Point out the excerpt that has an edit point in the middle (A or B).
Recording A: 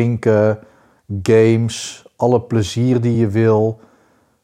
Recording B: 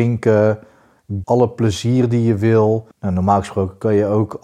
B